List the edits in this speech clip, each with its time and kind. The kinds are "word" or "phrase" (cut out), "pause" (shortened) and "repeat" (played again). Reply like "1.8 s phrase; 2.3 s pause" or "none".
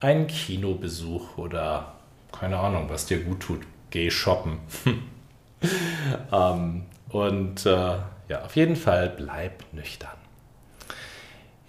none